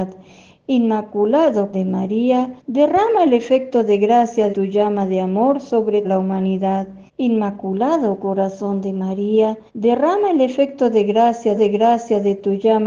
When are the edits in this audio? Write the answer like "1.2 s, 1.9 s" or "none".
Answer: 1.7 s, 2.6 s, 4.5 s, 6.0 s, 7.1 s, 9.7 s, 11.5 s